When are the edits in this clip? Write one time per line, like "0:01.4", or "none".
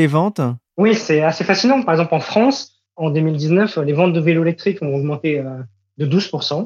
none